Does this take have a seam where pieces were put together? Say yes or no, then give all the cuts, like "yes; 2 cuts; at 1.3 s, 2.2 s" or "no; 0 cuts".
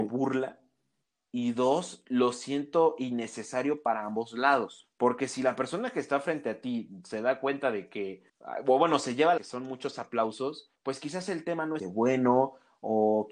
yes; 5 cuts; at 4.9 s, 8.3 s, 9.4 s, 10.8 s, 11.8 s